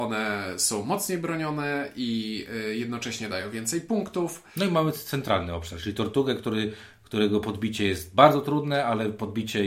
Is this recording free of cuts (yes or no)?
yes